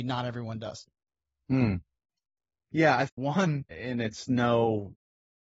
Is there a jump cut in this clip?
yes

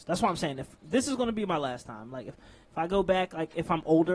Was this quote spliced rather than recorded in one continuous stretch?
no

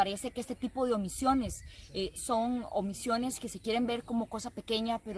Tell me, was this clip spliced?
no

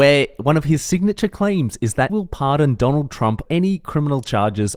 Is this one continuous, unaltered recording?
no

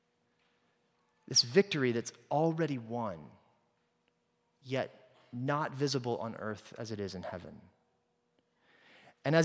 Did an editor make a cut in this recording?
no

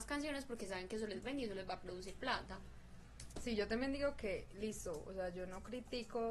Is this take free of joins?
yes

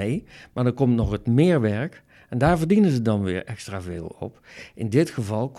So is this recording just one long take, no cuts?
yes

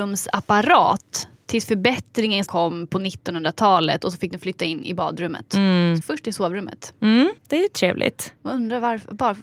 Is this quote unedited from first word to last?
no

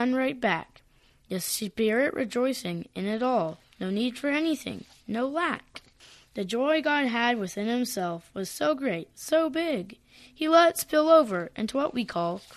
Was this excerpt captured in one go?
yes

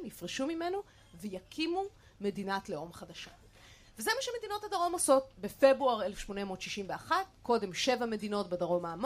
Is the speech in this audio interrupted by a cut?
no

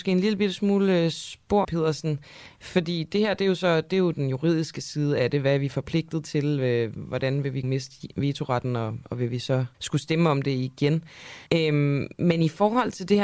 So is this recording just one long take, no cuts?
no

